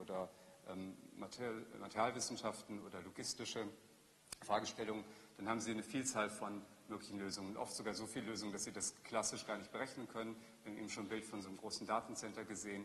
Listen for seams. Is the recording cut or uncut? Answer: uncut